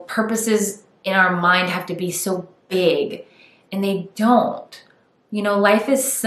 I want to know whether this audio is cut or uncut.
uncut